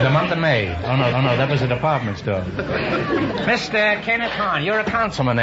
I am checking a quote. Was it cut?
yes; 1 cut; at 1.1 s

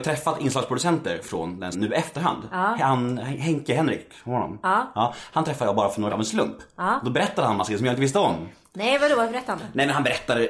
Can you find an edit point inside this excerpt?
yes; 2 cuts; at 1.7 s, 6.1 s

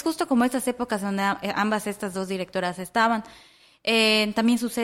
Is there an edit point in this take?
no; 0 cuts

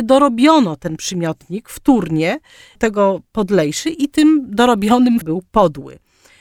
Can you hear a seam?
yes; 2 cuts; at 2.8 s, 5.2 s

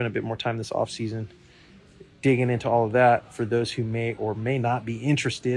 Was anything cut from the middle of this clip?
no; 0 cuts

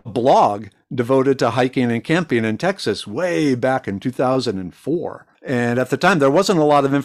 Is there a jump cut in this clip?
yes; 1 cut; at 5.3 s

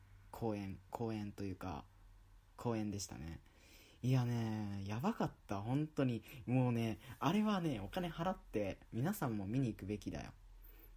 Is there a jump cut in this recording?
yes; 1 cut; at 2.6 s

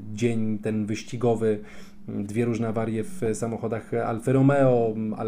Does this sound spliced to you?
no; 0 cuts

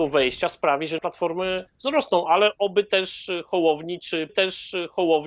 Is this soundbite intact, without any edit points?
no; 3 cuts; at 1.0 s, 1.7 s, 4.3 s

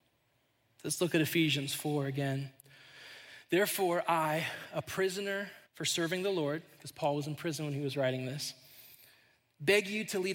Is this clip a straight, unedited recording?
no; 1 cut; at 5.7 s

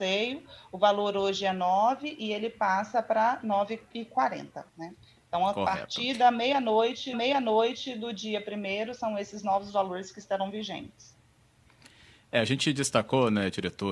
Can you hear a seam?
yes; 2 cuts; at 4.7 s, 7.1 s

